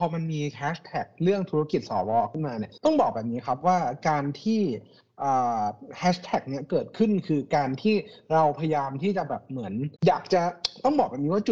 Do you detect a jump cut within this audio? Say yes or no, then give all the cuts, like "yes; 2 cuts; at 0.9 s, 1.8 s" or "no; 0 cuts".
yes; 2 cuts; at 2.8 s, 10.0 s